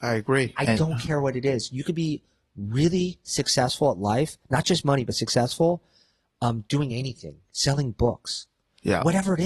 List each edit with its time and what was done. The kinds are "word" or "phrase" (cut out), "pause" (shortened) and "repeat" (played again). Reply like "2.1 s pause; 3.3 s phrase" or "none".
none